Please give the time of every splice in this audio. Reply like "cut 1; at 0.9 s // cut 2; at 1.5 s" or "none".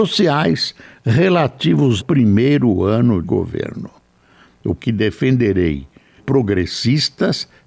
cut 1; at 2.0 s // cut 2; at 3.2 s // cut 3; at 4.8 s // cut 4; at 6.2 s

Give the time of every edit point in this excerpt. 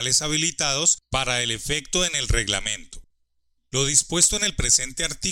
none

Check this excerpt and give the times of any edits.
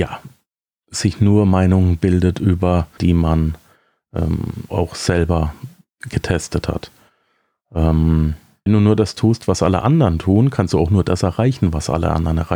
cut 1; at 3.0 s // cut 2; at 4.7 s // cut 3; at 8.7 s

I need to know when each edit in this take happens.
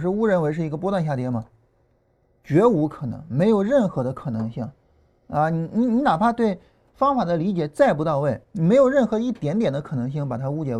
cut 1; at 4.8 s // cut 2; at 8.4 s

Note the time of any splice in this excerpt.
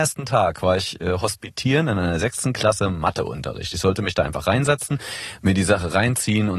none

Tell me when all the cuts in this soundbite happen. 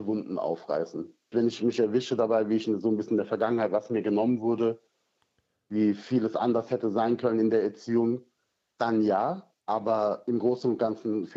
cut 1; at 9.6 s

